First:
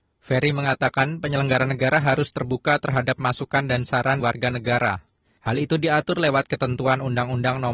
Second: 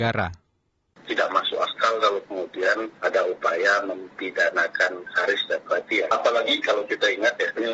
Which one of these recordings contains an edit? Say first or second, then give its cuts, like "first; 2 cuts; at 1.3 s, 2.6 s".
first; 1 cut; at 4.2 s